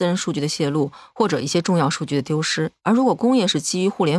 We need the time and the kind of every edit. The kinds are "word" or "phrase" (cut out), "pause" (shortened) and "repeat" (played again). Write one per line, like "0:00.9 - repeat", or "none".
0:02.8 - pause